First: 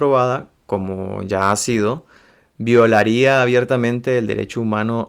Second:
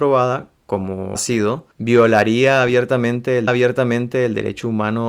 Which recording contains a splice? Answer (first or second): second